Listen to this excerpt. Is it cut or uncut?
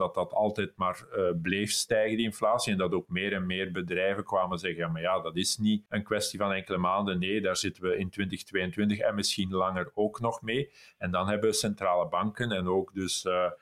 uncut